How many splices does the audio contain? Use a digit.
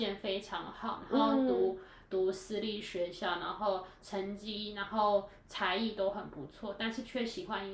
0